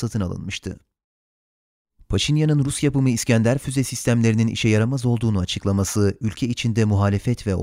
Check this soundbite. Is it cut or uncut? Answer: uncut